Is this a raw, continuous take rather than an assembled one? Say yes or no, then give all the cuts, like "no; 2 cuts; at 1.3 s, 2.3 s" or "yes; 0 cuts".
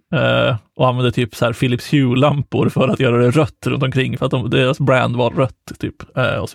yes; 0 cuts